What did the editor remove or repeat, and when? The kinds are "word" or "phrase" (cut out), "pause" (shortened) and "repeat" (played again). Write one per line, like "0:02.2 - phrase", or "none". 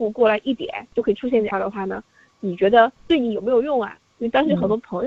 0:00.9 - pause
0:01.5 - word
0:03.0 - pause